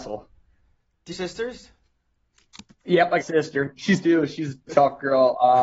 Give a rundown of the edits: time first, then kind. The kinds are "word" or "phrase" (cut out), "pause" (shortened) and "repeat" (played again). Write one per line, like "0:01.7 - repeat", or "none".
0:01.1 - phrase
0:03.2 - phrase
0:04.0 - word
0:04.7 - word